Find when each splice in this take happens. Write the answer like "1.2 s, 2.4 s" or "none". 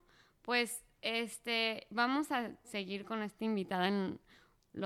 none